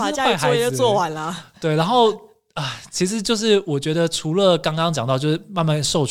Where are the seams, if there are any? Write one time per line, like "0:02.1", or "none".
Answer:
none